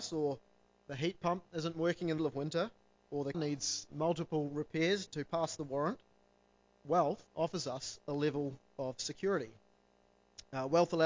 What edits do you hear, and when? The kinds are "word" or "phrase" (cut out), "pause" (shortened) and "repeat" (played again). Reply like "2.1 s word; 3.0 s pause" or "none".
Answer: 1.5 s pause; 2.2 s word; 2.9 s pause; 3.3 s word; 3.9 s word; 5.1 s word; 7.3 s pause